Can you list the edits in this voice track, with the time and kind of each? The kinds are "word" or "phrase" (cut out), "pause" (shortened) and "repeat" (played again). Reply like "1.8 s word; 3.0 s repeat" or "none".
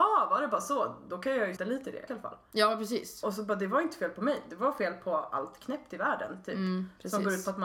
1.6 s word; 2.1 s phrase